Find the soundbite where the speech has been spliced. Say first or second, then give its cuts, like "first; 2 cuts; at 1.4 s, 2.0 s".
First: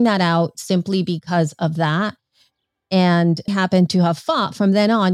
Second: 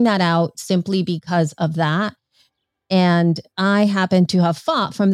first; 1 cut; at 3.5 s